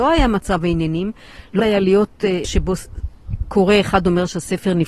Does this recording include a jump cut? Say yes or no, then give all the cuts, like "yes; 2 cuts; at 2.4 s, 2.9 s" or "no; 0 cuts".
yes; 2 cuts; at 1.6 s, 2.4 s